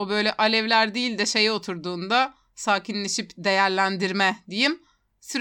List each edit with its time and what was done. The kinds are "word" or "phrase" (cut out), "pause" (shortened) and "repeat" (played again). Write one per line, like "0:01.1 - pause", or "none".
none